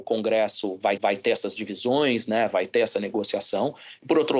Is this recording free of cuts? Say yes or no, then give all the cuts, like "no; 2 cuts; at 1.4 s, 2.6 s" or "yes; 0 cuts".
no; 1 cut; at 1.0 s